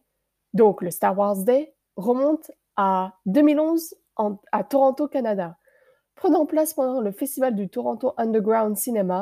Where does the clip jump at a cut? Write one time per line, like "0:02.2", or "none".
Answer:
none